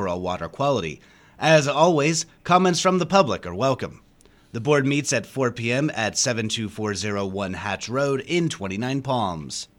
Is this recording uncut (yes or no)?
yes